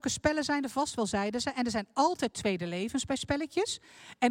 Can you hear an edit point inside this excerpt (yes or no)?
no